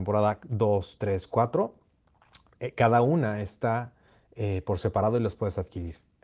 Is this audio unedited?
yes; 0 cuts

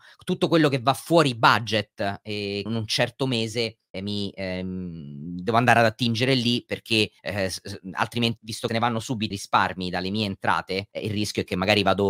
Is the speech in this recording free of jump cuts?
no; 7 cuts; at 2.7 s, 3.9 s, 7.2 s, 8.4 s, 8.7 s, 9.3 s, 10.9 s

